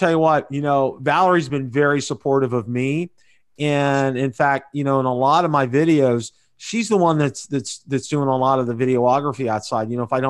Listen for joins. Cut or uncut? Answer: uncut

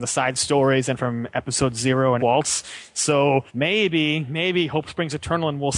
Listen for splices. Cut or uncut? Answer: cut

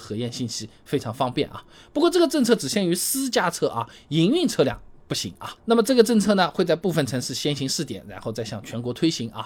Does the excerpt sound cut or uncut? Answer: uncut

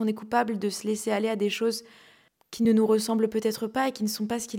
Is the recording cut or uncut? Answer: uncut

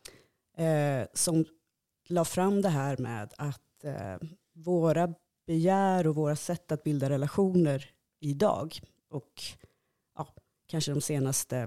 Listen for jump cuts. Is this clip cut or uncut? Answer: uncut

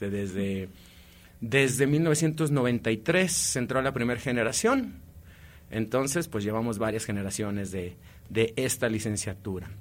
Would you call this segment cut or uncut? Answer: uncut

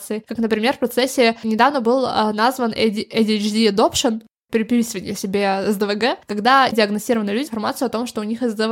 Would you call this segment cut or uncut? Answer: cut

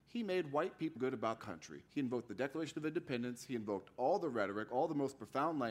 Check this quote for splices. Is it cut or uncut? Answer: cut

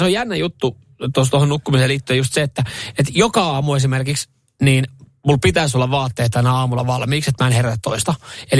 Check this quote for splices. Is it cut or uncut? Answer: uncut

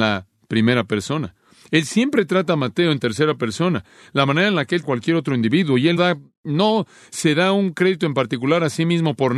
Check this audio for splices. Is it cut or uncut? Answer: cut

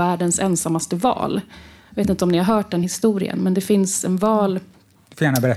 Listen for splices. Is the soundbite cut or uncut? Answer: uncut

